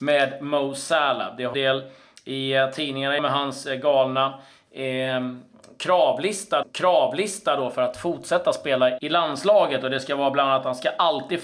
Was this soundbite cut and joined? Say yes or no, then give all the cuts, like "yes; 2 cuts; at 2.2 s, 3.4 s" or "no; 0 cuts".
yes; 4 cuts; at 1.5 s, 3.2 s, 6.6 s, 9.0 s